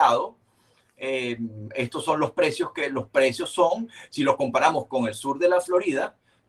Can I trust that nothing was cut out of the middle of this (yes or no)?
yes